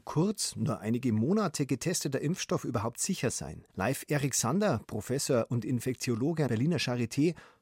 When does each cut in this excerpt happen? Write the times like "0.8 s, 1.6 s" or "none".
3.7 s, 6.5 s